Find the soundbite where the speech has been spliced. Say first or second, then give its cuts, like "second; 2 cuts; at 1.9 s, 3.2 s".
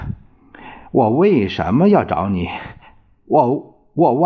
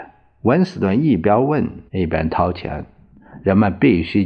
second; 1 cut; at 1.9 s